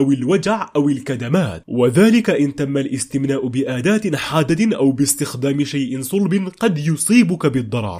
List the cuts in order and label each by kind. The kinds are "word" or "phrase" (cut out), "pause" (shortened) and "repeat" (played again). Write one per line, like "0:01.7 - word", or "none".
none